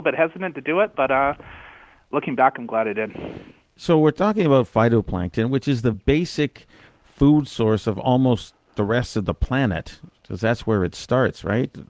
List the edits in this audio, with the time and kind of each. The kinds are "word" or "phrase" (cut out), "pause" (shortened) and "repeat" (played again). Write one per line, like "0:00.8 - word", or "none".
none

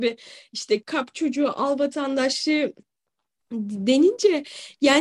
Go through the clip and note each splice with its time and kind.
none

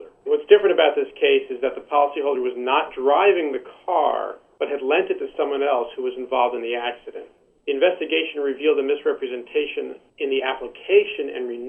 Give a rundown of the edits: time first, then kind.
none

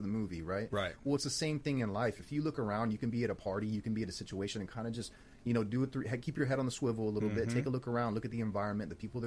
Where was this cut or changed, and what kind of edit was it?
none

